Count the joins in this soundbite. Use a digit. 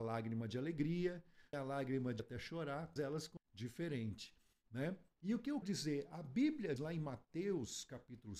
6